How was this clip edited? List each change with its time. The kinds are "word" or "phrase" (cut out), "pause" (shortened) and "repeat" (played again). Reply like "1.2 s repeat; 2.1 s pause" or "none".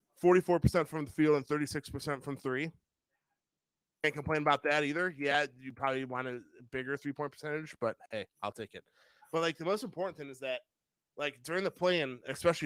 none